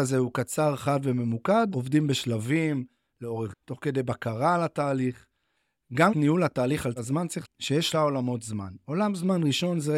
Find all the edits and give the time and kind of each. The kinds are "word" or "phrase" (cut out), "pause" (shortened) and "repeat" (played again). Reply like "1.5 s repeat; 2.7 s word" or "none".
1.7 s word; 3.5 s word; 6.1 s word; 7.0 s word; 7.4 s word; 7.9 s word